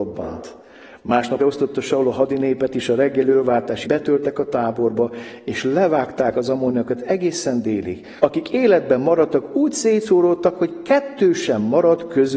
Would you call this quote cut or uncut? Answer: cut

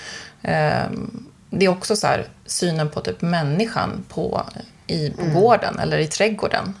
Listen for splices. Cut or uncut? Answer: uncut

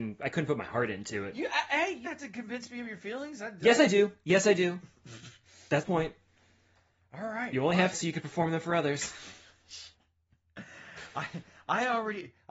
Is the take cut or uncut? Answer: cut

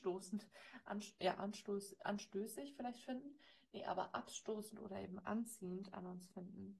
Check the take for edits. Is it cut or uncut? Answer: uncut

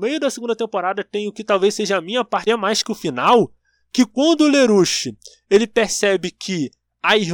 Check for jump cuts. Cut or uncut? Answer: cut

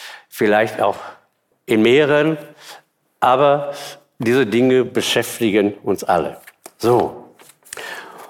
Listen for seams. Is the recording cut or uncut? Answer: uncut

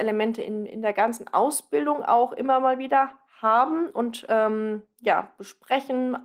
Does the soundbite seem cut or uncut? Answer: uncut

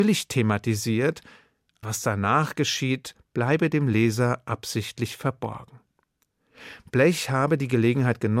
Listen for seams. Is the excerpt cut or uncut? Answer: cut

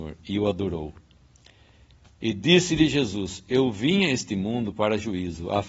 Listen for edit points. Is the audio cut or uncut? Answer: uncut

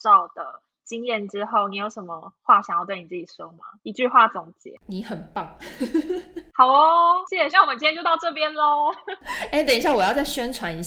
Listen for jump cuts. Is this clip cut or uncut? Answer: cut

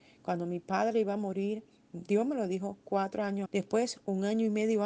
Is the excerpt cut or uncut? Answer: cut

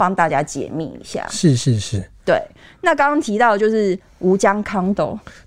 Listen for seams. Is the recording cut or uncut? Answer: uncut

